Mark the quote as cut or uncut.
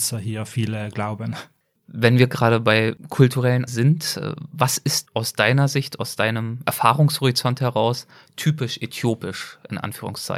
cut